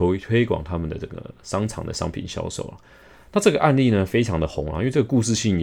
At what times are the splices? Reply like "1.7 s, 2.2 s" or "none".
none